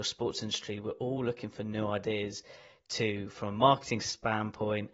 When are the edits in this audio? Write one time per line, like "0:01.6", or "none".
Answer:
none